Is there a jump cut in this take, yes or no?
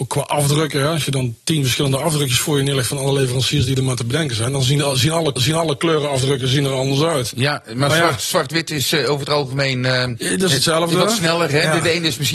yes